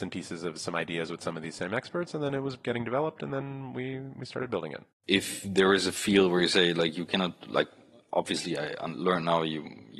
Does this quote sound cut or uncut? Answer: cut